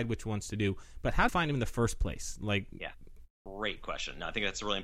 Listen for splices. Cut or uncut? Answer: cut